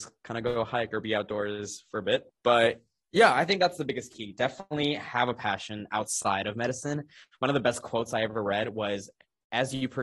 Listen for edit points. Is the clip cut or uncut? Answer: uncut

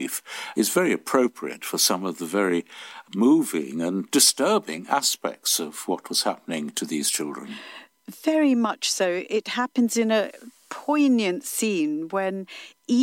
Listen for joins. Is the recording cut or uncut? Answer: uncut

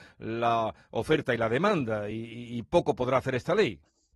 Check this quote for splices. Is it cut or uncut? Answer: uncut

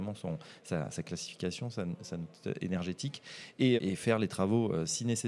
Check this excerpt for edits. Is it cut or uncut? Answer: cut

